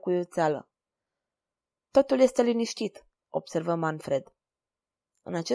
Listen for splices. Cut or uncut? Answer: uncut